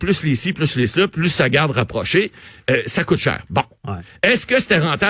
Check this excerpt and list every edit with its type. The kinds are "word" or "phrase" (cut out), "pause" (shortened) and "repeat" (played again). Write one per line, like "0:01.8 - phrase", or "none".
none